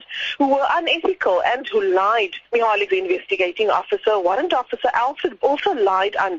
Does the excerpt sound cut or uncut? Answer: cut